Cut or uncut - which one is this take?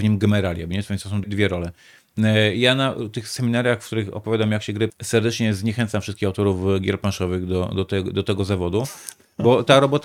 cut